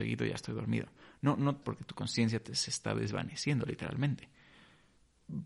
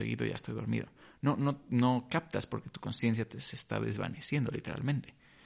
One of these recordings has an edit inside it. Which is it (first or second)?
first